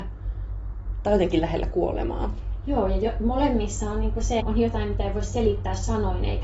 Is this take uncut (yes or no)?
no